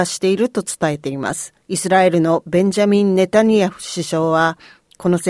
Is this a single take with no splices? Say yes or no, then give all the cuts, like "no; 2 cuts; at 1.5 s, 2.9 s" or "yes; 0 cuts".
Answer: no; 1 cut; at 1.6 s